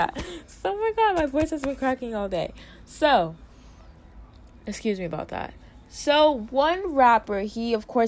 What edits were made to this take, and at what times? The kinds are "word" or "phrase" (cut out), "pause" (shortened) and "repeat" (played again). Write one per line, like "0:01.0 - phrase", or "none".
none